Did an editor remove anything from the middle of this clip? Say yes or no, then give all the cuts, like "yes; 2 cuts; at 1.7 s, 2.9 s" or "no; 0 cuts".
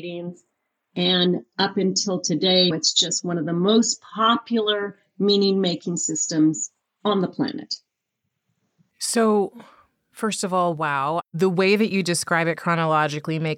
yes; 1 cut; at 2.7 s